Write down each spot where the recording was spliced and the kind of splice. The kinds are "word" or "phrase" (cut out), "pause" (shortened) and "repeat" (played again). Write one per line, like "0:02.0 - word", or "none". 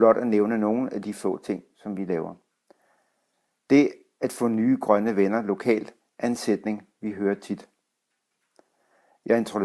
none